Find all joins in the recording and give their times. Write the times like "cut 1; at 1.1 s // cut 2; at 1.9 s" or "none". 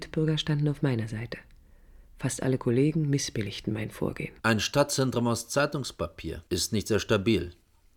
cut 1; at 2.1 s // cut 2; at 4.4 s // cut 3; at 6.5 s